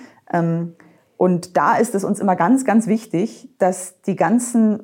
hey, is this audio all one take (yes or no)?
yes